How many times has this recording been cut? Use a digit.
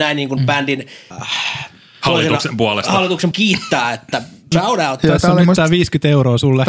3